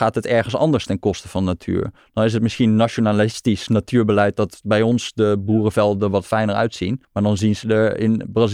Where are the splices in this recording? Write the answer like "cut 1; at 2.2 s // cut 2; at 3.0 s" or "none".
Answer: cut 1; at 7.0 s

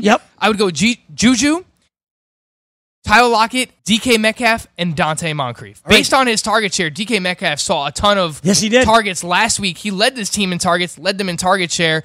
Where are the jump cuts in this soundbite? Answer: cut 1; at 3.8 s // cut 2; at 5.0 s

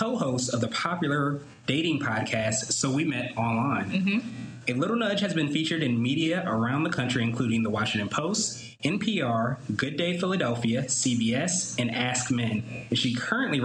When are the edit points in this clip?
none

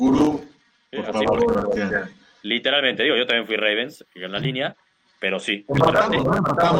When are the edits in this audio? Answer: none

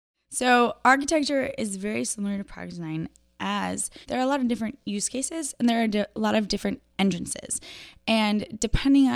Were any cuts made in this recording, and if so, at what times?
cut 1; at 4.0 s

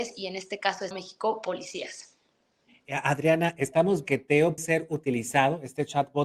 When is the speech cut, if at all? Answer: cut 1; at 0.9 s // cut 2; at 4.0 s // cut 3; at 4.6 s

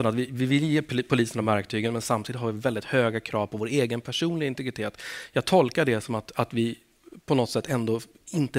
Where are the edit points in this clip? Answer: none

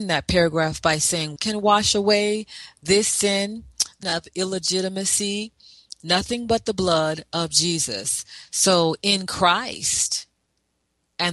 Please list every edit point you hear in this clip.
cut 1; at 1.4 s // cut 2; at 4.0 s

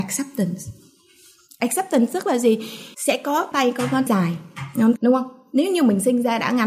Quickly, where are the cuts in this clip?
cut 1; at 2.9 s // cut 2; at 3.5 s // cut 3; at 4.1 s // cut 4; at 5.0 s

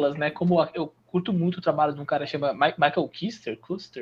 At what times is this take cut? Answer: cut 1; at 1.0 s

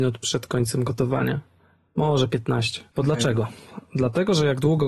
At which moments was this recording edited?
cut 1; at 2.9 s

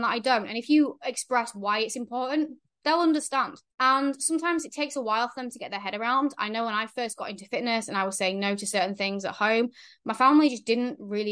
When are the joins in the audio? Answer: cut 1; at 3.7 s

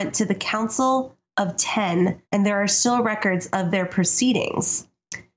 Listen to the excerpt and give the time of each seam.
cut 1; at 2.2 s

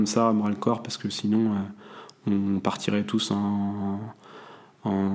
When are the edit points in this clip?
none

